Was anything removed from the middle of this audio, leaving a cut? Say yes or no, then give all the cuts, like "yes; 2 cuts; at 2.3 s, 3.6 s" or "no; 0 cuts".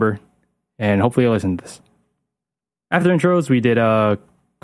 no; 0 cuts